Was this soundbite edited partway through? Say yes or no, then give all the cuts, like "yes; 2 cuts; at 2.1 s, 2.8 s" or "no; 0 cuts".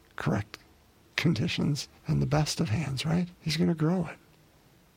yes; 2 cuts; at 2.0 s, 3.3 s